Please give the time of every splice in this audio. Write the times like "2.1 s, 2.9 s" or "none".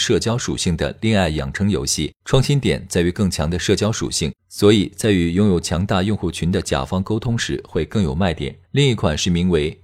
2.2 s, 4.4 s, 8.6 s